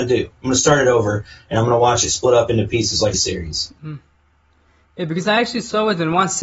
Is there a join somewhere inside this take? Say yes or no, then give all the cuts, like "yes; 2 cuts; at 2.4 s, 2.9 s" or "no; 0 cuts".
yes; 1 cut; at 3.1 s